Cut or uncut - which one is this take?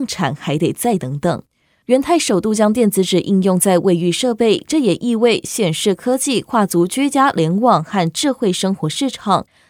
uncut